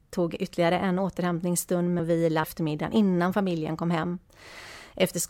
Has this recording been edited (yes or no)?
yes